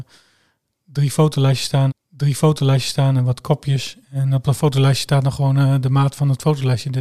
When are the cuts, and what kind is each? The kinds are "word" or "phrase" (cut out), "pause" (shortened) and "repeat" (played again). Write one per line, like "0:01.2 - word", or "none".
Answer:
0:01.9 - repeat
0:04.0 - pause